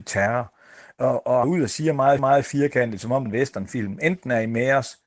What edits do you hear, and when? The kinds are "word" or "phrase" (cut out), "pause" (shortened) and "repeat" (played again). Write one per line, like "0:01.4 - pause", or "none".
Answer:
0:01.4 - phrase
0:02.2 - repeat
0:03.3 - phrase